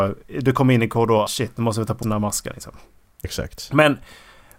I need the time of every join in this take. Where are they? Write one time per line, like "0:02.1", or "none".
0:01.3
0:02.0
0:03.2